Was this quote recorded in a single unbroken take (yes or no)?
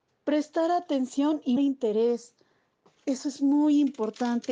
no